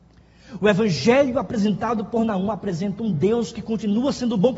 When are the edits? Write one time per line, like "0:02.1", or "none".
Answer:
none